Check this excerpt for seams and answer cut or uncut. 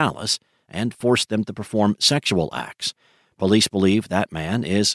uncut